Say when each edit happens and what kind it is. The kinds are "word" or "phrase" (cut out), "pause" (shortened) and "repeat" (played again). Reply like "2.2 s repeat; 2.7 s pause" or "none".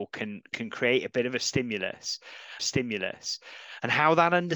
2.6 s repeat